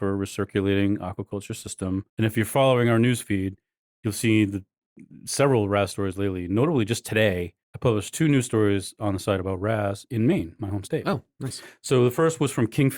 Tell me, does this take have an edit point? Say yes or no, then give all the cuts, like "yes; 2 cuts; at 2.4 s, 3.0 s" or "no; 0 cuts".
yes; 2 cuts; at 2.1 s, 7.6 s